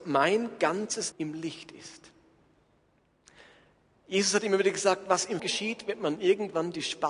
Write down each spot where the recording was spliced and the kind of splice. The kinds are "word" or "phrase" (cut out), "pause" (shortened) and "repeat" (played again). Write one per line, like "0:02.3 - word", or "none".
0:01.1 - word
0:05.4 - word